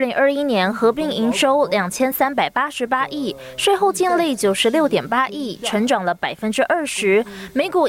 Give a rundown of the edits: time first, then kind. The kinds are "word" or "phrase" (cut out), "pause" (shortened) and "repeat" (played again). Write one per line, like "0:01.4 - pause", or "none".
none